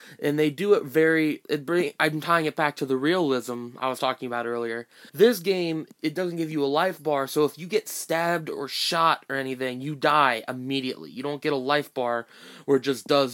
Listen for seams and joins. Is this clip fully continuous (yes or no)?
no